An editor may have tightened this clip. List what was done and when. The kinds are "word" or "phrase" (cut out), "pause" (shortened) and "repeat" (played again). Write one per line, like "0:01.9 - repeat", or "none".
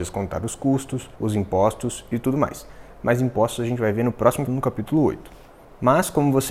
0:01.2 - pause
0:04.5 - word